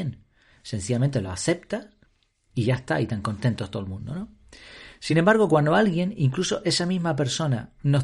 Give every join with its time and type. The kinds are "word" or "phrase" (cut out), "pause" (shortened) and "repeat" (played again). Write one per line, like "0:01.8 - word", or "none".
none